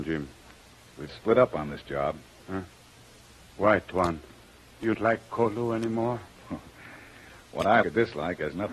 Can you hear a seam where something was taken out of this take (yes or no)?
yes